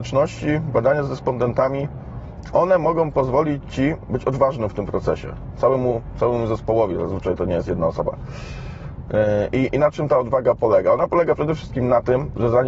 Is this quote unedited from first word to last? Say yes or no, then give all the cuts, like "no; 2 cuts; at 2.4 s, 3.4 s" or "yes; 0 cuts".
yes; 0 cuts